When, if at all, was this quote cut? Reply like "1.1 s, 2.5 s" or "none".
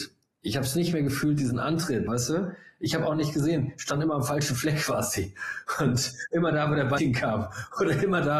2.1 s, 7.0 s